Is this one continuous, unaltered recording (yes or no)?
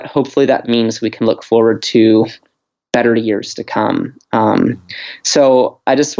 yes